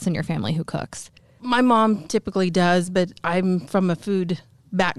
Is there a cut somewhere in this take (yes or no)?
no